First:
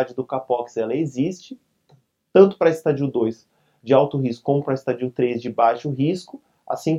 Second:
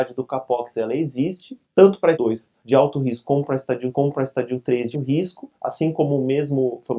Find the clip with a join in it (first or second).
second